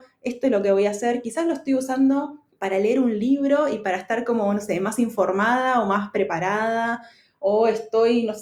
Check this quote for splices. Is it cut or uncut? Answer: uncut